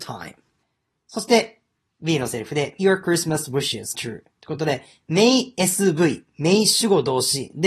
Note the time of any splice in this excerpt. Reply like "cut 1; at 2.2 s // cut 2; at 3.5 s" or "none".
cut 1; at 2.8 s // cut 2; at 3.9 s